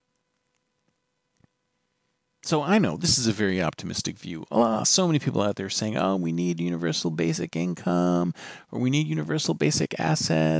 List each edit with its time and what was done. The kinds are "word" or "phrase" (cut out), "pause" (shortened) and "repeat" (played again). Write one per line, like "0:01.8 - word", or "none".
none